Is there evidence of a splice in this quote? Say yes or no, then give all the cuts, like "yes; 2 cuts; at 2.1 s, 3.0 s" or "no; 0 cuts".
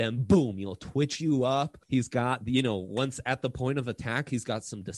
yes; 1 cut; at 1.8 s